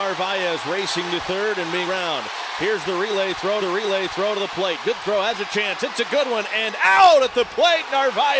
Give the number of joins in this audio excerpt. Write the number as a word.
two